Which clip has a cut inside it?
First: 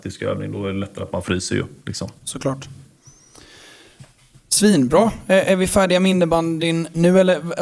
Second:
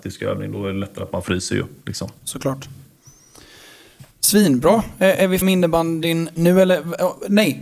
second; 2 cuts; at 4.1 s, 5.4 s

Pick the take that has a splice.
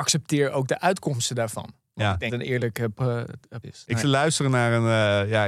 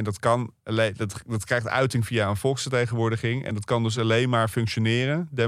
first; 3 cuts; at 2.3 s, 3.6 s, 4.0 s

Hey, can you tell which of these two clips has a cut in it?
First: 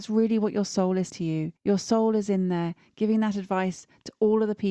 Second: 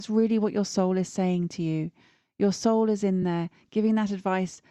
first; 2 cuts; at 1.1 s, 1.6 s

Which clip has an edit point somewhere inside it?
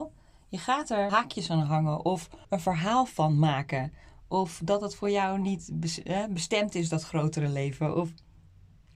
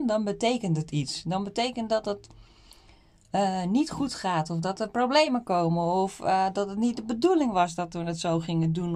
first; 2 cuts; at 1.1 s, 2.4 s

